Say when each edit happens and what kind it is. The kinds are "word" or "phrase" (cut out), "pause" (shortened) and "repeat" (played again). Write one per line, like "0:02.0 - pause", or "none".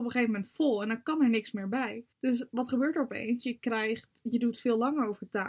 0:02.1 - pause